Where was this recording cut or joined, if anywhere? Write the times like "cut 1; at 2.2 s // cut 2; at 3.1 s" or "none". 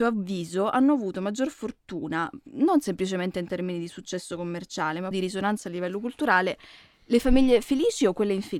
cut 1; at 5.1 s